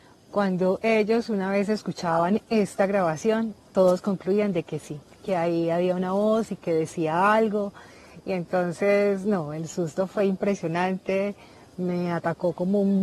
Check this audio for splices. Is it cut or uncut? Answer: uncut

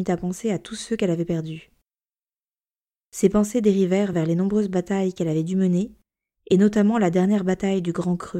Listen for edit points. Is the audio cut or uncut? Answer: uncut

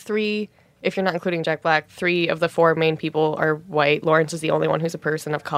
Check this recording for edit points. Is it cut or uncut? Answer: uncut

